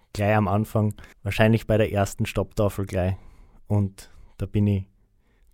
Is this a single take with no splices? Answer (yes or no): no